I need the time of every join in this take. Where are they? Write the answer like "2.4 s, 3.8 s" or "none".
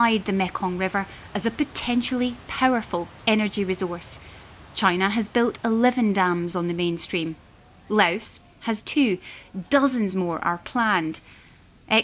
none